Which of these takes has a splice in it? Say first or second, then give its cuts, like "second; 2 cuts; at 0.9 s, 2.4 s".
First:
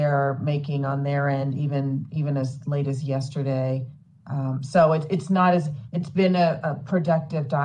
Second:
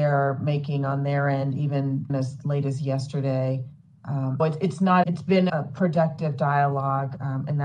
second; 4 cuts; at 2.1 s, 4.4 s, 5.0 s, 5.5 s